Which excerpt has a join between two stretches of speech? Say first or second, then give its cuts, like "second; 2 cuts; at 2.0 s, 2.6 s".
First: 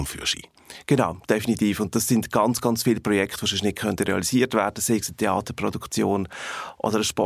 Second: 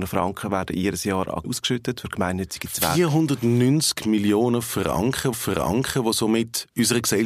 second; 2 cuts; at 1.4 s, 5.3 s